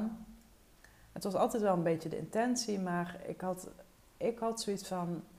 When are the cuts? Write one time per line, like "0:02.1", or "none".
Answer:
none